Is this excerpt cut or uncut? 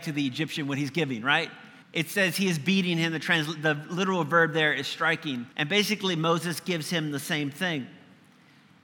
cut